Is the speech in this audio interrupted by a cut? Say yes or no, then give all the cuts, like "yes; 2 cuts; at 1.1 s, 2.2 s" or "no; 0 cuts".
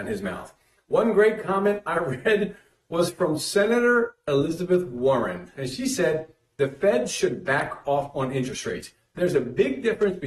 no; 0 cuts